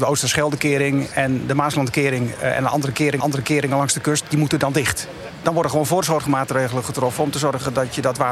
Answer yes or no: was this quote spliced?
yes